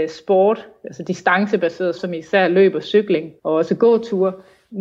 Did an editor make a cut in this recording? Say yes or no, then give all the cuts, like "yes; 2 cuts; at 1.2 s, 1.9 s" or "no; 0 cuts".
yes; 2 cuts; at 2.0 s, 3.4 s